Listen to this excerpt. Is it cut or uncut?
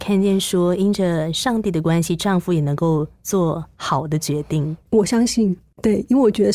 cut